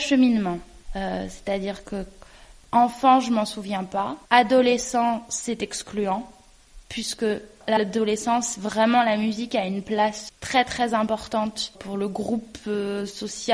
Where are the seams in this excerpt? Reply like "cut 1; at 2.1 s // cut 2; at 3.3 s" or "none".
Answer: cut 1; at 7.8 s // cut 2; at 10.3 s // cut 3; at 11.7 s